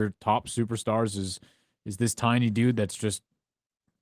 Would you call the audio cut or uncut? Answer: uncut